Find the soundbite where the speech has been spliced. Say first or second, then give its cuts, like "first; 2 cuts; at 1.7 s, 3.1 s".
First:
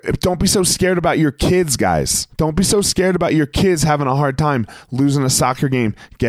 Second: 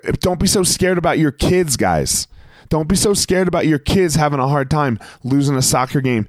first; 1 cut; at 2.3 s